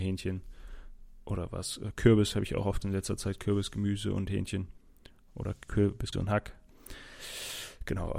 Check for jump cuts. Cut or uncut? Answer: cut